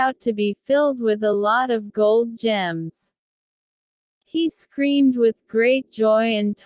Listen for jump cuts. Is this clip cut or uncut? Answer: uncut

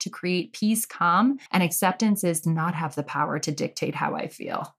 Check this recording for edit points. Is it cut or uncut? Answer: cut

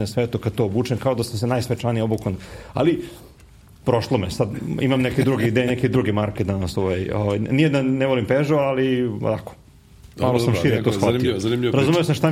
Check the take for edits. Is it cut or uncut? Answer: uncut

